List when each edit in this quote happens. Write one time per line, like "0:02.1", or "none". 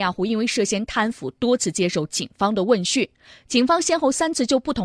none